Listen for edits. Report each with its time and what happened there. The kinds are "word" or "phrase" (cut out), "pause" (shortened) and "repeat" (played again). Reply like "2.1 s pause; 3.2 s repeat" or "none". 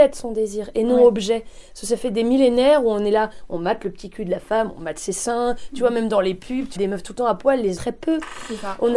6.8 s word; 7.8 s word